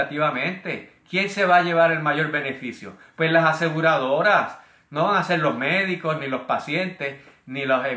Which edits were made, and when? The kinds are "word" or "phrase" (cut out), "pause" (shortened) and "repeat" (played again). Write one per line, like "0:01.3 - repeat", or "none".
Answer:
none